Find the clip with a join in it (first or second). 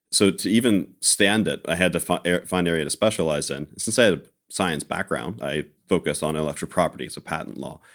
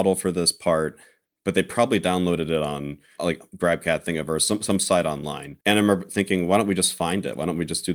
second